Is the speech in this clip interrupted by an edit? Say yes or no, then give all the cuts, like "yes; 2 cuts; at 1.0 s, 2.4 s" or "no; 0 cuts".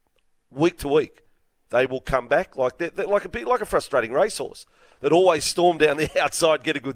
no; 0 cuts